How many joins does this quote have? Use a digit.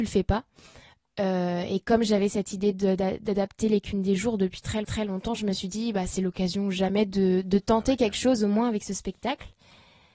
1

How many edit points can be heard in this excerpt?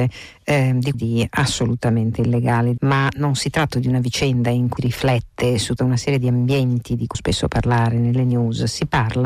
6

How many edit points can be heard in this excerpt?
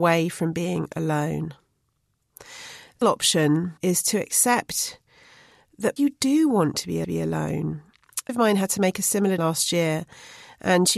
6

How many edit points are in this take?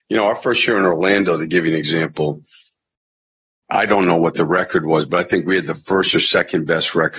0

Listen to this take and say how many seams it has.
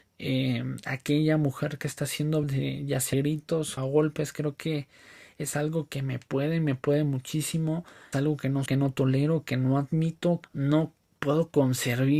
6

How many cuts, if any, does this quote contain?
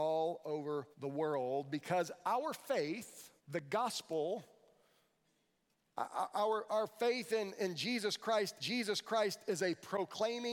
3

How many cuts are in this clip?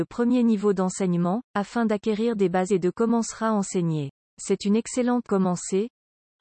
4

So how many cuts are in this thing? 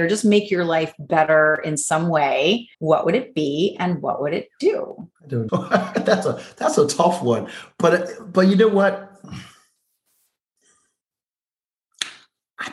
3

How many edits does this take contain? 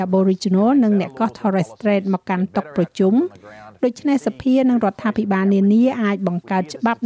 0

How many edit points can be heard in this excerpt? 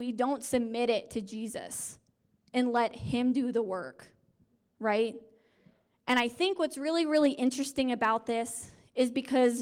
0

